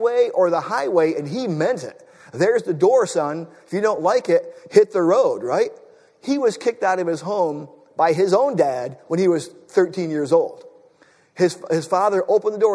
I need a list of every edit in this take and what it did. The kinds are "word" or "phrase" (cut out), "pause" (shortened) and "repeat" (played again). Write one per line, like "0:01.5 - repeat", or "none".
none